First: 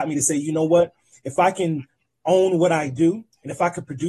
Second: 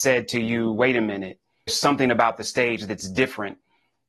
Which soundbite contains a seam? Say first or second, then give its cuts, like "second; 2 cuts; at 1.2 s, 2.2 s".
second; 1 cut; at 1.7 s